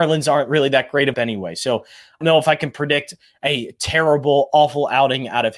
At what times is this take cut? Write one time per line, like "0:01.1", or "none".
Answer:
0:01.1
0:02.2